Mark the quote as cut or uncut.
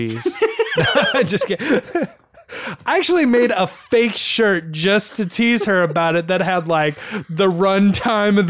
uncut